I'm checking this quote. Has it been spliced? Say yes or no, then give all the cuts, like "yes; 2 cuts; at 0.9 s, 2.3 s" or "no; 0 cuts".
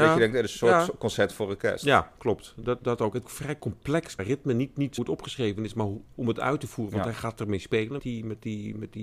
yes; 5 cuts; at 2.8 s, 3.2 s, 4.2 s, 5.0 s, 8.0 s